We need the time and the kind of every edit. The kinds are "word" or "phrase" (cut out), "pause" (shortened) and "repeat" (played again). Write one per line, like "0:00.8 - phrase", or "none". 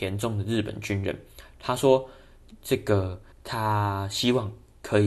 0:03.3 - pause